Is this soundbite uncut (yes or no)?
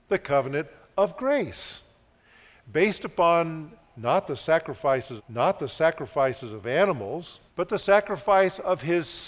no